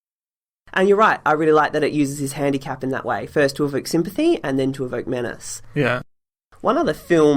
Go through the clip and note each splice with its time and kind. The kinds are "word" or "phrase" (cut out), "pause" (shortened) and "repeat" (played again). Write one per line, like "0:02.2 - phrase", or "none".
none